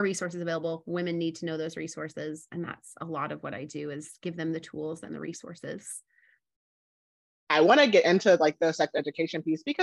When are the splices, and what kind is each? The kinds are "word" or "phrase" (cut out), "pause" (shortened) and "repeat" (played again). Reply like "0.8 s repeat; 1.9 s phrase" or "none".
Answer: none